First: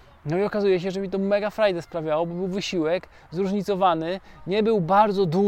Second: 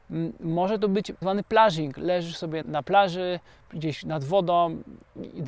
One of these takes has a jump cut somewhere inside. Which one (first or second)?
second